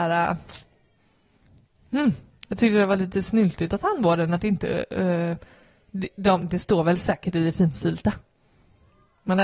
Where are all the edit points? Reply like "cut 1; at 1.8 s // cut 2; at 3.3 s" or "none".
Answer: none